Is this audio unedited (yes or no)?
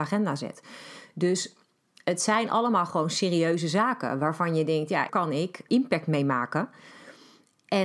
no